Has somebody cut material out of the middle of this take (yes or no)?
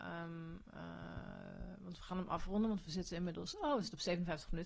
no